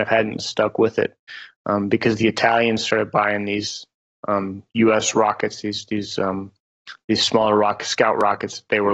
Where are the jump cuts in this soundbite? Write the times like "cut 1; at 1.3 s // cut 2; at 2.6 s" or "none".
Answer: none